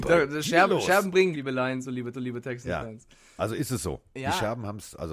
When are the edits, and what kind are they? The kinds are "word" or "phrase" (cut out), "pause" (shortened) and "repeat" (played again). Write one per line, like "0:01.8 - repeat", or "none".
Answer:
0:01.3 - word
0:02.1 - repeat